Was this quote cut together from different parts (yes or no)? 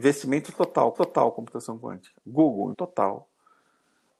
yes